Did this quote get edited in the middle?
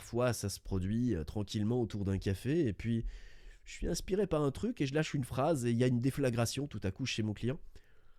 no; 0 cuts

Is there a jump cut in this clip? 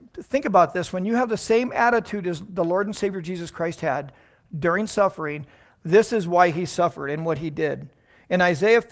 no; 0 cuts

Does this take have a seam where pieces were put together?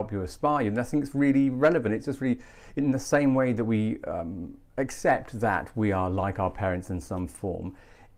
no; 0 cuts

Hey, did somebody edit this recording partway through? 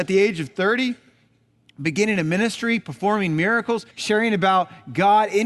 yes; 1 cut; at 3.9 s

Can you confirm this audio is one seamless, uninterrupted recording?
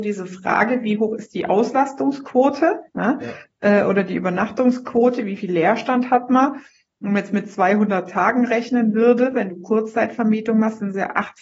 yes; 0 cuts

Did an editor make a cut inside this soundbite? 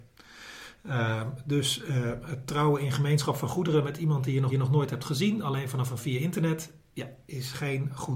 yes; 2 cuts; at 4.5 s, 6.0 s

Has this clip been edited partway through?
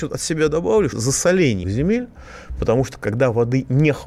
yes; 2 cuts; at 0.9 s, 1.6 s

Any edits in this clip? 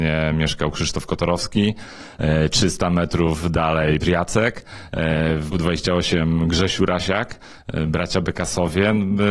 yes; 2 cuts; at 4.0 s, 5.5 s

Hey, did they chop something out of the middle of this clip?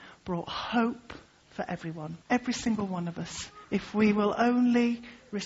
yes; 3 cuts; at 1.3 s, 2.2 s, 3.6 s

